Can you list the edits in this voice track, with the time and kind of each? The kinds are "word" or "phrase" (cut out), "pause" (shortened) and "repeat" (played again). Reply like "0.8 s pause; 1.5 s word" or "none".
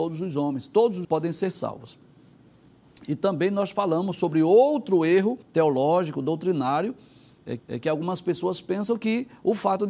1.0 s word; 5.4 s pause; 7.6 s repeat